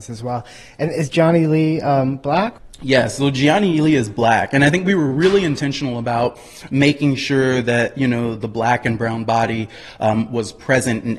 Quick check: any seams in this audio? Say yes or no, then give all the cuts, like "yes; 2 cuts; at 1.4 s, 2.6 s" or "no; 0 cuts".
no; 0 cuts